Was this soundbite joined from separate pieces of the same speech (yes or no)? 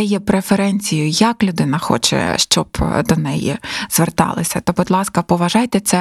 no